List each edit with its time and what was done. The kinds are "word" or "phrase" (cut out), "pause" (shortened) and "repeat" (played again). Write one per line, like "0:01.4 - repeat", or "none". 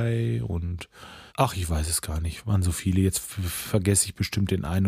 0:01.3 - pause